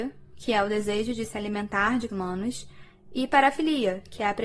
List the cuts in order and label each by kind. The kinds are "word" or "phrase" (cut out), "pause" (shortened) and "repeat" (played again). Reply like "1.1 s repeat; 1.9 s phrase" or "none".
2.1 s word